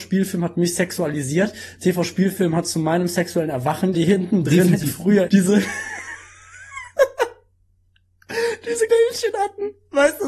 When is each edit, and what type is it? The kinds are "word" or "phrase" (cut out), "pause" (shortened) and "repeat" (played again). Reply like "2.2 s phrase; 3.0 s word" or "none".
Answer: 3.9 s phrase; 5.3 s word; 8.9 s word